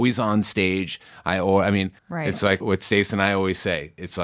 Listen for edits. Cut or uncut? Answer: cut